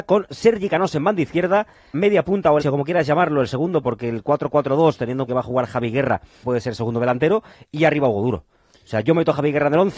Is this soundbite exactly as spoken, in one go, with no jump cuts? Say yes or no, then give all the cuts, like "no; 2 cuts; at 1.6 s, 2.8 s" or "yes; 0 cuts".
no; 5 cuts; at 1.9 s, 2.6 s, 3.8 s, 5.3 s, 6.4 s